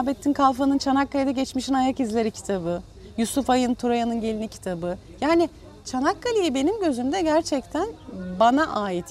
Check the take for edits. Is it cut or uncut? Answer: uncut